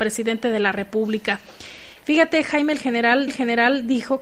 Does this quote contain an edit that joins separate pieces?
yes; 1 cut; at 3.3 s

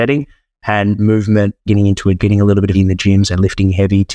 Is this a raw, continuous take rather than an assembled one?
no; 3 cuts; at 1.7 s, 2.2 s, 2.7 s

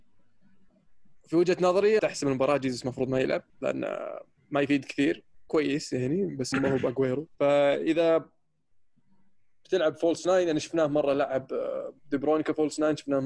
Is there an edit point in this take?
yes; 4 cuts; at 2.0 s, 3.5 s, 6.5 s, 7.3 s

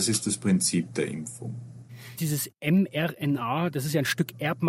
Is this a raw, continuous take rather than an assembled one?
yes; 0 cuts

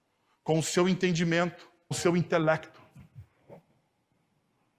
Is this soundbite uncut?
no; 1 cut; at 1.9 s

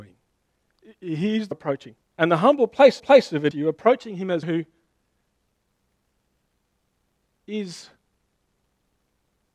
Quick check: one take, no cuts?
no; 5 cuts; at 1.5 s, 2.0 s, 3.0 s, 3.5 s, 4.4 s

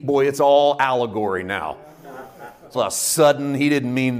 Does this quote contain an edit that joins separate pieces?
yes; 1 cut; at 2.7 s

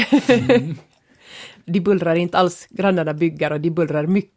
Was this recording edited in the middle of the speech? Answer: no; 0 cuts

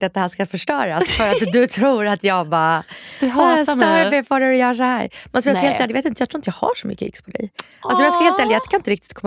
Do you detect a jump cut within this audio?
no; 0 cuts

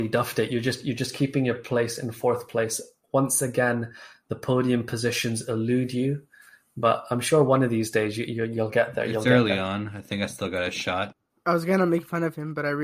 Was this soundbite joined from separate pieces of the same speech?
no; 0 cuts

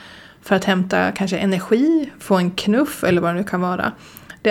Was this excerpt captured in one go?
yes; 0 cuts

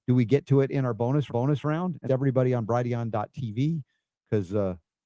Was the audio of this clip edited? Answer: yes; 2 cuts; at 1.3 s, 2.1 s

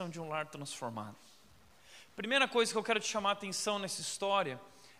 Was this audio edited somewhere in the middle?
no; 0 cuts

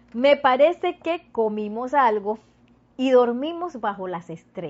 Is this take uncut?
yes; 0 cuts

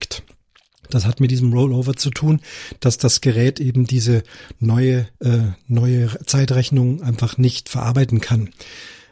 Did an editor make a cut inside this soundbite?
yes; 1 cut; at 5.1 s

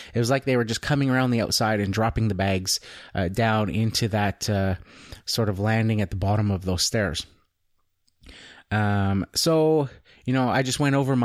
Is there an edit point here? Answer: no; 0 cuts

